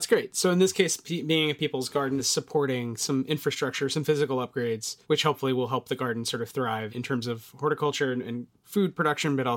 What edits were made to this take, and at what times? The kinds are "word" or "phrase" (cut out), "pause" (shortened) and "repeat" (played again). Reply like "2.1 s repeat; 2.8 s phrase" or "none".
2.2 s phrase; 5.0 s pause; 6.9 s word